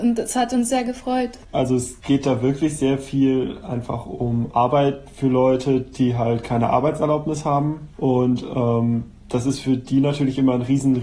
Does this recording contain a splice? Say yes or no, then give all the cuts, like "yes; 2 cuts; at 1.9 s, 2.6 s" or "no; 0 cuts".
yes; 2 cuts; at 1.4 s, 7.9 s